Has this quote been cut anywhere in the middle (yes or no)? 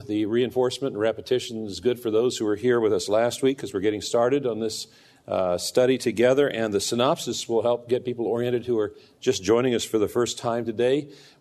no